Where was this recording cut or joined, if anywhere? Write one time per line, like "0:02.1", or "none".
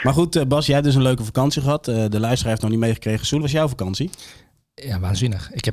0:03.4